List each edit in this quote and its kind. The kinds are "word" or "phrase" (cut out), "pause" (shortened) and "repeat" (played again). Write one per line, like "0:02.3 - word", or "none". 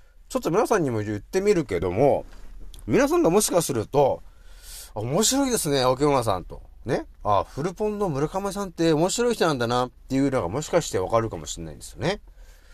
0:07.1 - pause